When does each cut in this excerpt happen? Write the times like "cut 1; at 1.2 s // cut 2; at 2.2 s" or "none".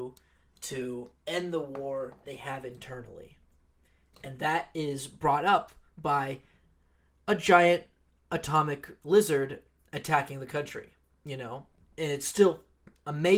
cut 1; at 2.2 s